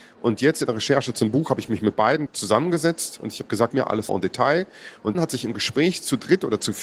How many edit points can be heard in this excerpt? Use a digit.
4